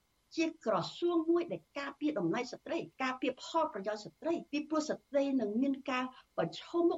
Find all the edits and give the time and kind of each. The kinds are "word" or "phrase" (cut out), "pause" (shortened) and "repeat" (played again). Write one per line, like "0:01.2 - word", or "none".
0:02.9 - pause
0:04.5 - pause